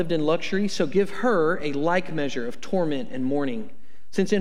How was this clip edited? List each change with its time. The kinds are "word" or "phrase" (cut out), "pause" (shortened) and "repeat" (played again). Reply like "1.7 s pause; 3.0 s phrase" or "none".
none